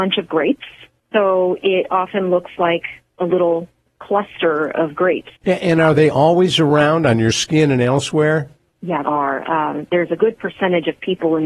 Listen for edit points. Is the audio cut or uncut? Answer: cut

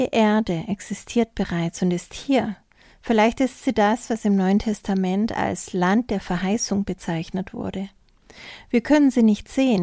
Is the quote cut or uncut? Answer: uncut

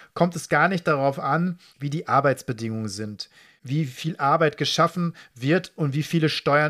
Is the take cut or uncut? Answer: uncut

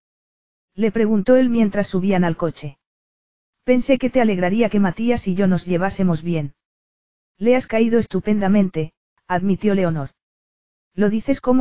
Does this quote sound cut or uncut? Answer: uncut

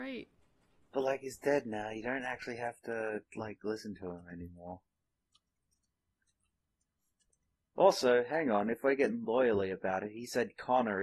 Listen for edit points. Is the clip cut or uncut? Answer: uncut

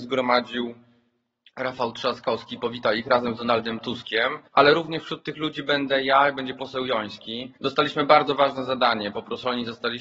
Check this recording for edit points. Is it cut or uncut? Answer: cut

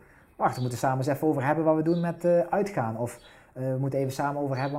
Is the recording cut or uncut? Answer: uncut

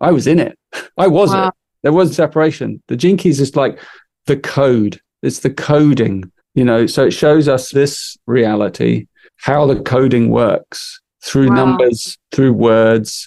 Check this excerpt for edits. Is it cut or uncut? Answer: cut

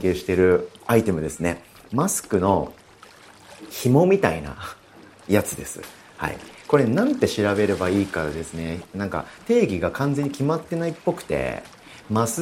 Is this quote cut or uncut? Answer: uncut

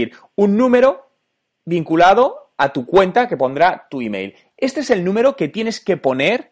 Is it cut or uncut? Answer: uncut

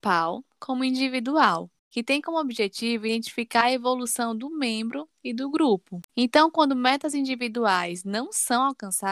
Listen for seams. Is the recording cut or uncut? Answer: cut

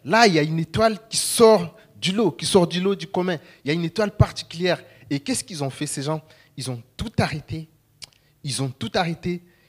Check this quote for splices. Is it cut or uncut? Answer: uncut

